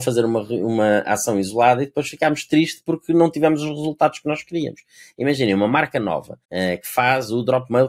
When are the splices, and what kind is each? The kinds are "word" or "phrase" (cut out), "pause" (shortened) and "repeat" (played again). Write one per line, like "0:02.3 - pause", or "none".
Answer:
0:06.4 - pause